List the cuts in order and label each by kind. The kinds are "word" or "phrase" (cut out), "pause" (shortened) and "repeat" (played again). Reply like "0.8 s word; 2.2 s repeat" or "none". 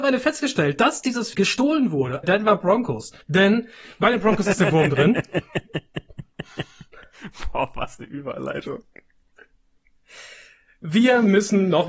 1.3 s word; 2.2 s phrase; 3.2 s pause